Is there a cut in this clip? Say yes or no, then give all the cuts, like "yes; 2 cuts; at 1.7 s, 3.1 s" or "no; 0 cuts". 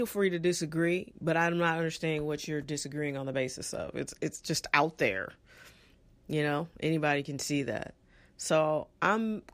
no; 0 cuts